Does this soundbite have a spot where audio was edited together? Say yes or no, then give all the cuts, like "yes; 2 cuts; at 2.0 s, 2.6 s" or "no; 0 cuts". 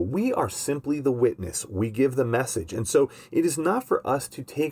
no; 0 cuts